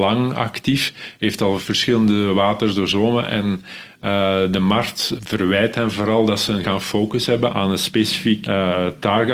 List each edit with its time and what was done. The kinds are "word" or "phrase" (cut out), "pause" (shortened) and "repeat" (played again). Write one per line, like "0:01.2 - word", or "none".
0:05.2 - word
0:06.6 - word
0:07.5 - word
0:08.4 - word